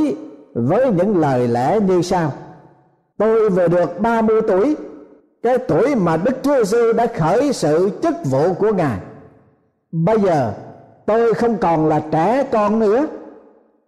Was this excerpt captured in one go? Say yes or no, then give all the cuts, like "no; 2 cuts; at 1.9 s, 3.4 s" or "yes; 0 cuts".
yes; 0 cuts